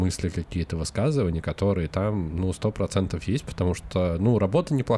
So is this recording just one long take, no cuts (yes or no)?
yes